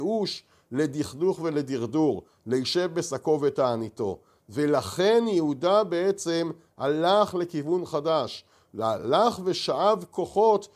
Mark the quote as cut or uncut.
uncut